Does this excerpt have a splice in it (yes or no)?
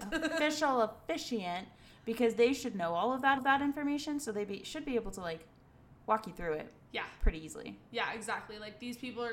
yes